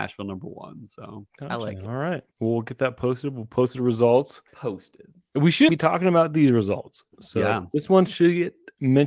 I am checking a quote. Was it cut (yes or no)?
yes